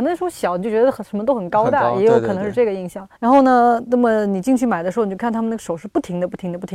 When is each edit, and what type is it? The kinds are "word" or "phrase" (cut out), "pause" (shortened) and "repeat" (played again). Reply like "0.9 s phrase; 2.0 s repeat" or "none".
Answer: 3.2 s pause